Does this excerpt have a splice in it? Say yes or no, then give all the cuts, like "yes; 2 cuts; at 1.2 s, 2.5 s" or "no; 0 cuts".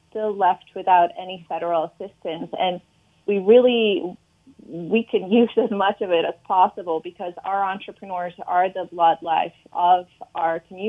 no; 0 cuts